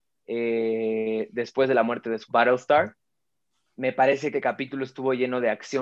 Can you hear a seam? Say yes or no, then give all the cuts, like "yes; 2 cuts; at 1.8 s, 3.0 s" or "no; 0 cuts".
yes; 2 cuts; at 2.3 s, 4.3 s